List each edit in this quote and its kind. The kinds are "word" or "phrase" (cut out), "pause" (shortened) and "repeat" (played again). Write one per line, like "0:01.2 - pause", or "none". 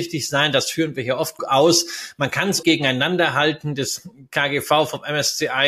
0:01.4 - word
0:02.6 - phrase